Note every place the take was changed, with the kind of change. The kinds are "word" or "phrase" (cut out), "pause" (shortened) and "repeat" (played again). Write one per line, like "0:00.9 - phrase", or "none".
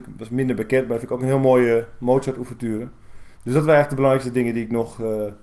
0:03.3 - pause

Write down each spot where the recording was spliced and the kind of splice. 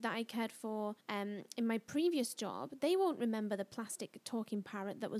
0:01.0 - pause

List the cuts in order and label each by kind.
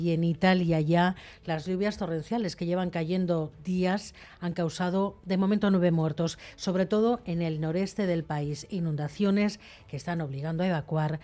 none

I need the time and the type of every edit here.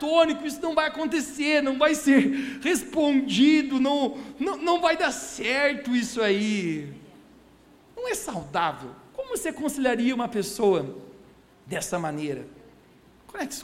none

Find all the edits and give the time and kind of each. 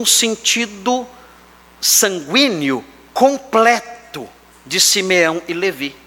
none

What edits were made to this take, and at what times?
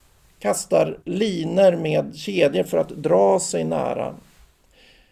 0:01.0 - pause

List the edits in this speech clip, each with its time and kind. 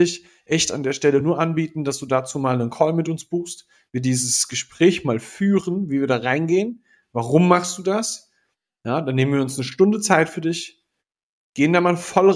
none

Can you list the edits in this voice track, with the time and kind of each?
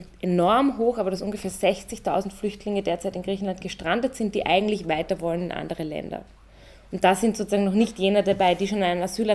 none

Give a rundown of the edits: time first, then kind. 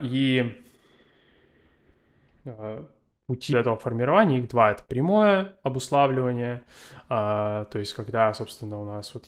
0:03.5 - word

